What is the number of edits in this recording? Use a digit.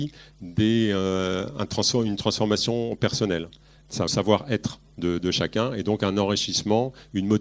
1